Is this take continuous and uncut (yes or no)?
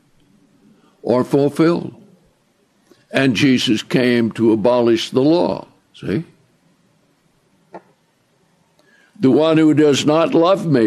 no